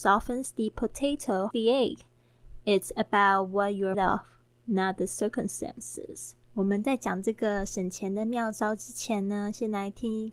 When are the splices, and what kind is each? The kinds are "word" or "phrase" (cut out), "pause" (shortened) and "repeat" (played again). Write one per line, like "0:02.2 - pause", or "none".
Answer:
0:01.5 - word
0:03.9 - word
0:06.4 - pause